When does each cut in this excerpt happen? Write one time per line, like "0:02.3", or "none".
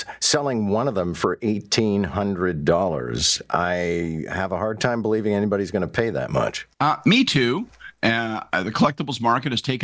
0:06.7